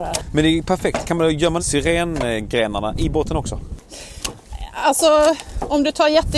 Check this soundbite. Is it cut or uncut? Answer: cut